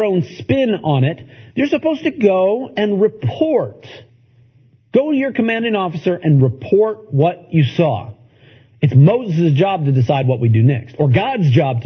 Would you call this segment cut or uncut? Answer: uncut